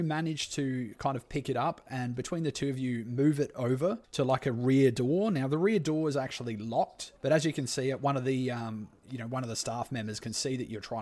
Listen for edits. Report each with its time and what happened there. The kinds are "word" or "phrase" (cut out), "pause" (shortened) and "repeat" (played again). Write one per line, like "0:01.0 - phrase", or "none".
0:04.0 - pause
0:07.2 - pause